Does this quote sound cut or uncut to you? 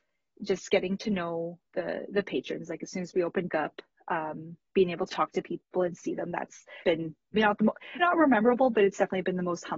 cut